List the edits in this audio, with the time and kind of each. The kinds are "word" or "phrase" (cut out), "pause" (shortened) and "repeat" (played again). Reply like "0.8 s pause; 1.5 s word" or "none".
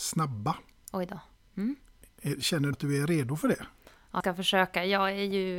2.7 s word; 4.2 s word